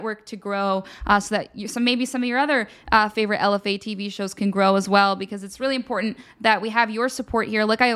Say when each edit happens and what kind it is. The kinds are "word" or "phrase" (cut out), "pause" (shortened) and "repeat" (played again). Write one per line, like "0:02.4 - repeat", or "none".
none

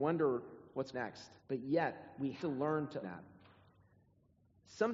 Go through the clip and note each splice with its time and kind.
0:00.9 - phrase
0:01.4 - pause
0:02.4 - word
0:03.0 - word

